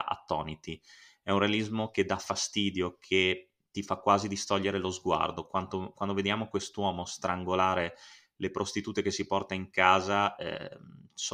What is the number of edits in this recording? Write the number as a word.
zero